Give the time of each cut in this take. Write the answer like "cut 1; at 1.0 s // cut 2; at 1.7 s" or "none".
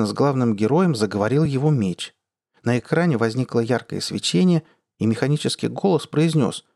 none